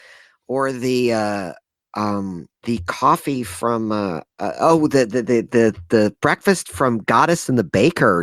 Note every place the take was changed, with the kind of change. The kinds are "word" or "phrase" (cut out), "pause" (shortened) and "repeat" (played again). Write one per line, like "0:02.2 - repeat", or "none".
0:02.5 - pause
0:04.3 - pause